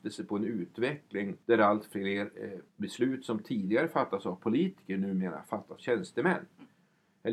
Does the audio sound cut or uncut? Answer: cut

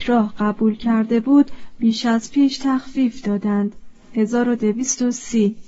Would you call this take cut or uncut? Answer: uncut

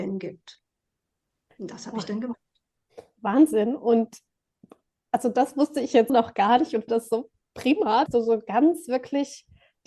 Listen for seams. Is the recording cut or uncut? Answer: cut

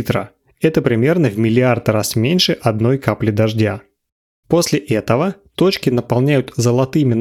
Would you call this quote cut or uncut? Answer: uncut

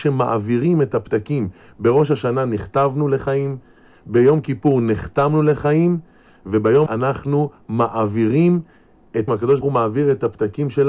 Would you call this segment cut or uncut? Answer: cut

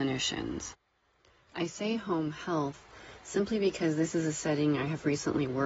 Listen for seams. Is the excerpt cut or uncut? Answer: uncut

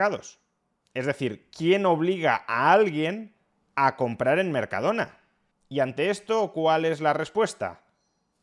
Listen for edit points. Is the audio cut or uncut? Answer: uncut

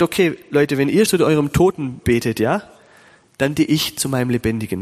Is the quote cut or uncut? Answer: cut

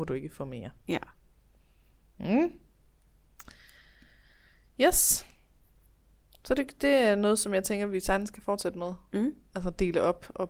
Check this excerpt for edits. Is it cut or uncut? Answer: uncut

